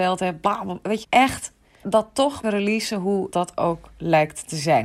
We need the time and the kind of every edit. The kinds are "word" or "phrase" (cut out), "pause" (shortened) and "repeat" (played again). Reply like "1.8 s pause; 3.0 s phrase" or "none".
1.0 s word; 1.8 s word; 2.4 s word; 3.3 s word